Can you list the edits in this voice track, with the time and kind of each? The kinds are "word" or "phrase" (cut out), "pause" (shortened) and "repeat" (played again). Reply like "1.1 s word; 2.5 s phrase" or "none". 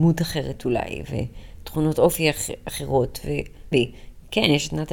3.7 s phrase